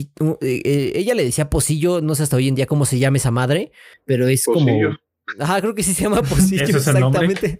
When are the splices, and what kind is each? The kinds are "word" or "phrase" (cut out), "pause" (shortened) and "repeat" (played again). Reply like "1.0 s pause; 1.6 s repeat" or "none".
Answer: none